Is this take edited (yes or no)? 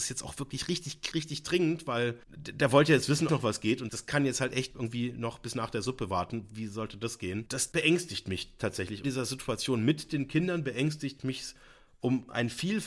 yes